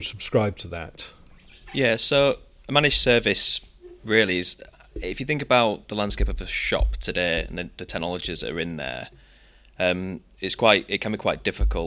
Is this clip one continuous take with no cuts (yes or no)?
yes